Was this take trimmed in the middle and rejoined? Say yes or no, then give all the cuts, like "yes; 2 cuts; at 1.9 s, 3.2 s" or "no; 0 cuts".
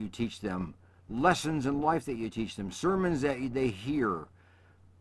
no; 0 cuts